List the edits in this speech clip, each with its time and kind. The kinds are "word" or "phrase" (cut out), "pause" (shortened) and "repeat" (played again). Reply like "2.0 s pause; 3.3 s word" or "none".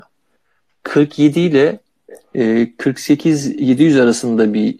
none